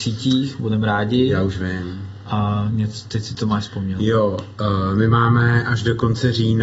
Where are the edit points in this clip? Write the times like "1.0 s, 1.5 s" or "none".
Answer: none